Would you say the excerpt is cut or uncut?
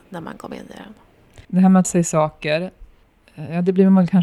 cut